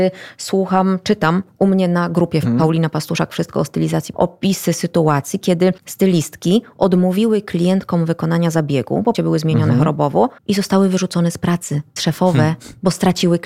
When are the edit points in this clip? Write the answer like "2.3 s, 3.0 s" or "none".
2.4 s, 4.1 s, 5.8 s, 9.1 s, 10.4 s, 12.0 s